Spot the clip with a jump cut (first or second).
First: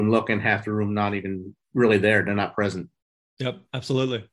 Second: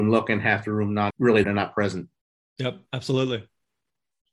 second